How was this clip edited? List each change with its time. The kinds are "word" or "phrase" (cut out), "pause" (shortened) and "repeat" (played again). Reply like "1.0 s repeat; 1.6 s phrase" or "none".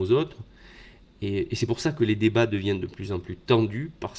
none